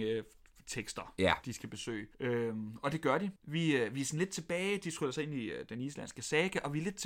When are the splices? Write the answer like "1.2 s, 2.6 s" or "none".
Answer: 2.1 s, 3.4 s